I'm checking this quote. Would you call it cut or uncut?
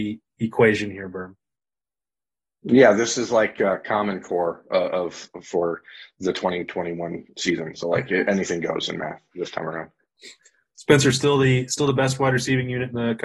uncut